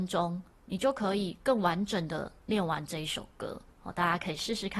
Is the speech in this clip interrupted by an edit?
yes; 1 cut; at 3.7 s

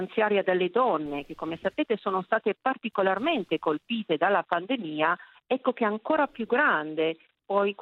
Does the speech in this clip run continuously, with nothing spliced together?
yes; 0 cuts

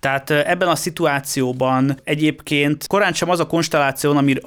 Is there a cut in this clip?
no; 0 cuts

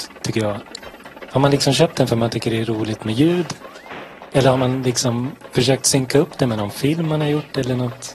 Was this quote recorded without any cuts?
yes; 0 cuts

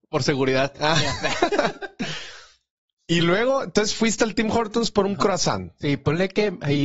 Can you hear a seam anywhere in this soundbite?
no; 0 cuts

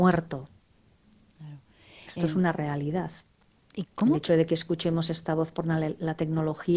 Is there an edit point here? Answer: no; 0 cuts

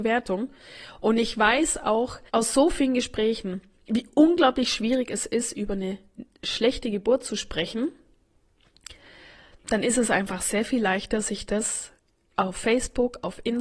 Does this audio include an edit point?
yes; 1 cut; at 2.3 s

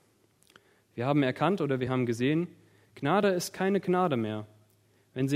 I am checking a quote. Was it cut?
no; 0 cuts

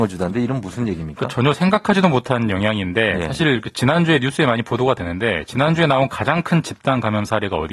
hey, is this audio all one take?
yes; 0 cuts

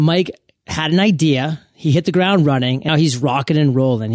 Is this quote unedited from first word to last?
no; 1 cut; at 2.9 s

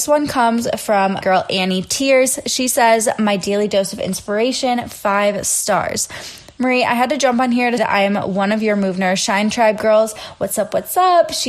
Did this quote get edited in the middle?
yes; 2 cuts; at 1.2 s, 7.8 s

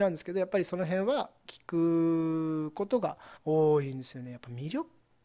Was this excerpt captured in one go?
no; 1 cut; at 3.3 s

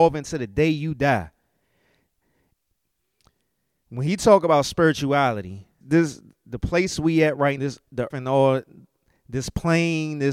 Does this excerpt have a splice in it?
yes; 3 cuts; at 5.8 s, 7.6 s, 8.1 s

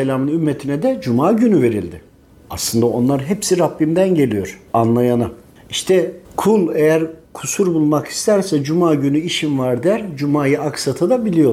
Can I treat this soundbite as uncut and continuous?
no; 3 cuts; at 4.7 s, 6.2 s, 7.2 s

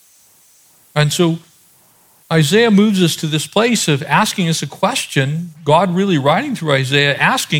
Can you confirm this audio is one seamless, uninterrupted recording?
yes; 0 cuts

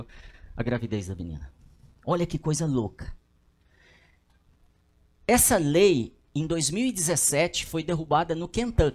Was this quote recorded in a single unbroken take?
yes; 0 cuts

